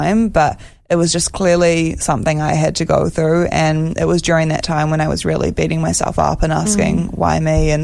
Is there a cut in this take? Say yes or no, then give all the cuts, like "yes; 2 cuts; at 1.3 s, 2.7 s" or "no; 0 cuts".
no; 0 cuts